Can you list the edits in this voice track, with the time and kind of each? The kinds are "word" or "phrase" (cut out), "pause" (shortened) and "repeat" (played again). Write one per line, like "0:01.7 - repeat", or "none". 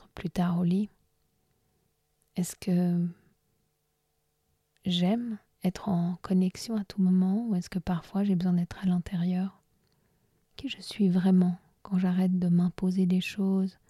none